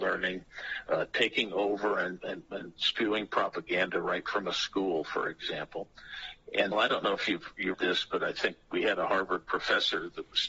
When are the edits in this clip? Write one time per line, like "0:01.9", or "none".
0:06.7
0:07.7